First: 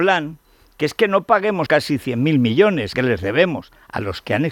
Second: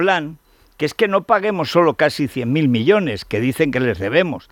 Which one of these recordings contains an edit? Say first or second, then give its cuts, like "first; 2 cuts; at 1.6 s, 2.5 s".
first; 2 cuts; at 1.7 s, 2.9 s